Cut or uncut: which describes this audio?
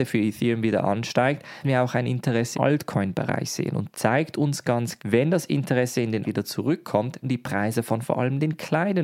cut